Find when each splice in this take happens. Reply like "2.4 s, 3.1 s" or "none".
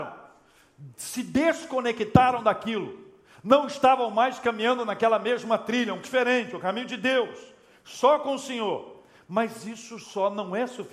6.0 s